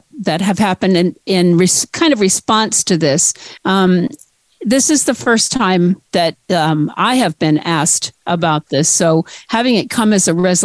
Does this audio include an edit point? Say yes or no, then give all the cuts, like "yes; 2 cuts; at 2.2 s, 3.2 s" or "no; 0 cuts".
yes; 2 cuts; at 3.6 s, 6.4 s